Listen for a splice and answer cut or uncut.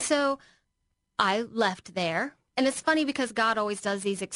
cut